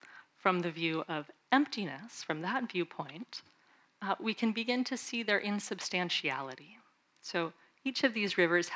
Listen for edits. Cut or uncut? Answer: uncut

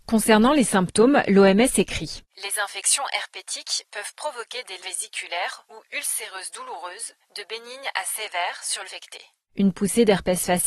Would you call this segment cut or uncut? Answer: cut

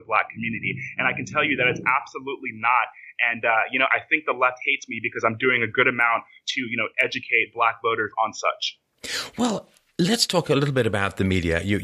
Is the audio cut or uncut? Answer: uncut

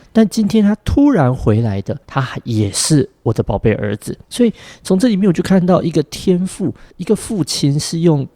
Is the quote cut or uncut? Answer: cut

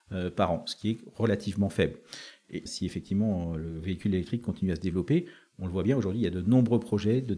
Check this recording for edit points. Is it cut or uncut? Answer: cut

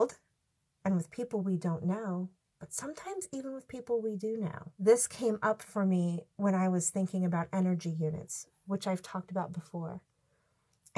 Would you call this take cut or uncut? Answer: cut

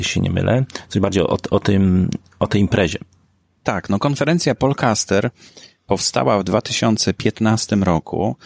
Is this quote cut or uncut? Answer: uncut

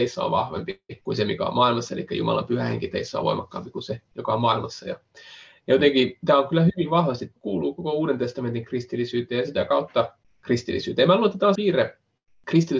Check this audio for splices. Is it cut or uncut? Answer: cut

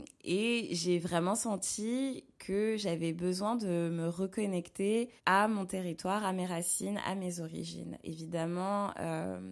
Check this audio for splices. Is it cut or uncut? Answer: cut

